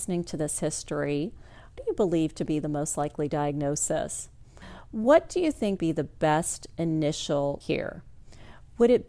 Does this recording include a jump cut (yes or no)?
yes